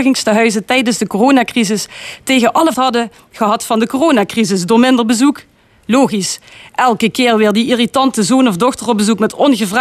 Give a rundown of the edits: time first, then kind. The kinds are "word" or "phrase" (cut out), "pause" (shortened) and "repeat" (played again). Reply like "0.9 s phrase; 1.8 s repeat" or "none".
2.7 s phrase